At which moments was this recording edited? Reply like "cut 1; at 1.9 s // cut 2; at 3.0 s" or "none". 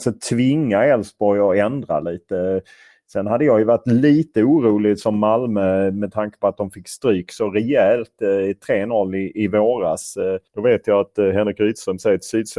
cut 1; at 10.5 s